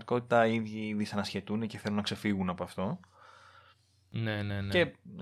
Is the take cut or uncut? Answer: uncut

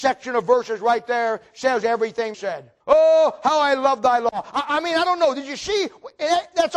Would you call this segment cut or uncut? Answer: cut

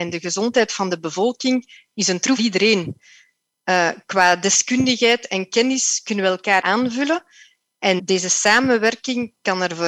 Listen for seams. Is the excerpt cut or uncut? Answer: cut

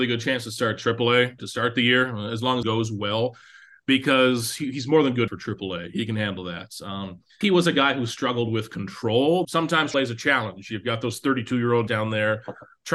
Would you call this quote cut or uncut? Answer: cut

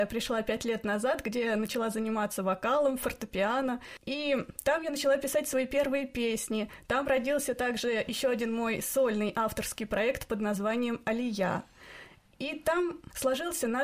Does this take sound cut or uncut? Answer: uncut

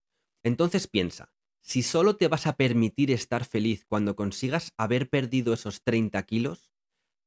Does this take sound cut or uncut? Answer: uncut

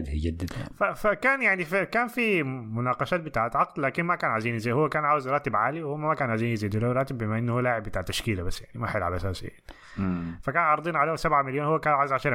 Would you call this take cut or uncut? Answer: uncut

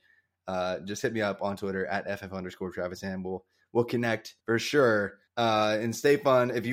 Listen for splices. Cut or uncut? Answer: cut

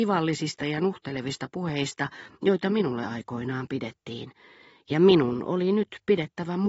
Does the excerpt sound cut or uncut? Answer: uncut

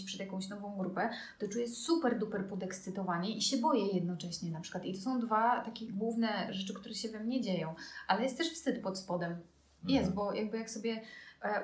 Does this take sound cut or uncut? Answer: uncut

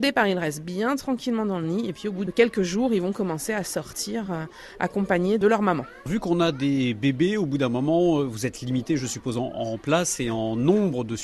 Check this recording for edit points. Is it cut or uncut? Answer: uncut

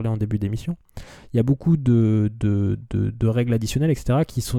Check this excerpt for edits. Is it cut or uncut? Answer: uncut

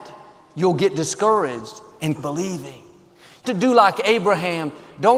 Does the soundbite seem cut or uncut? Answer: cut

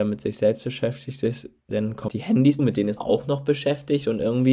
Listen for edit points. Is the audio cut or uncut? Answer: cut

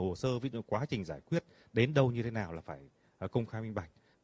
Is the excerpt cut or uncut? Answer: uncut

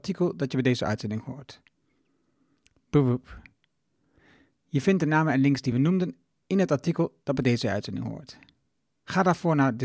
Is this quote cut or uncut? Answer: uncut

